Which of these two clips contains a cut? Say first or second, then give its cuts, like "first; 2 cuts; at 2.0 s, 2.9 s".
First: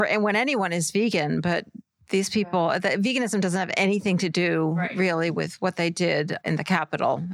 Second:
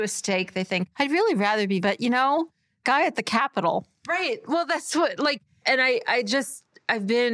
second; 4 cuts; at 0.9 s, 1.8 s, 2.8 s, 5.6 s